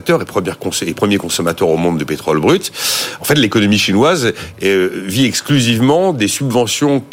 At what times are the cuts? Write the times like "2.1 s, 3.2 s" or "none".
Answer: none